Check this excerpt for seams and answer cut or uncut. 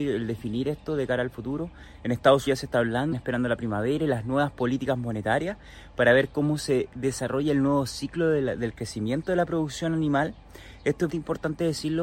cut